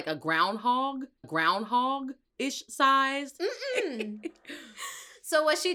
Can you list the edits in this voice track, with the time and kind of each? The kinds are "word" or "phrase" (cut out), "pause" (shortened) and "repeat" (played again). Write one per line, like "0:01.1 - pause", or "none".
0:01.2 - repeat